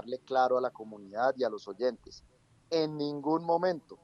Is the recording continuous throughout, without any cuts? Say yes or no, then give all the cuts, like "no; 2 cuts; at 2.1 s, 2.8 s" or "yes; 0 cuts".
yes; 0 cuts